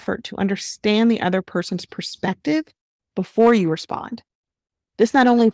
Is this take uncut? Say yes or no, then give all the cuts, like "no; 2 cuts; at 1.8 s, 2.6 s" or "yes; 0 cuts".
yes; 0 cuts